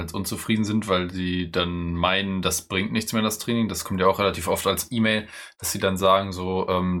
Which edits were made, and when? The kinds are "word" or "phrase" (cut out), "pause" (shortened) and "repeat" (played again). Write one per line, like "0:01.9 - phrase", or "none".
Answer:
none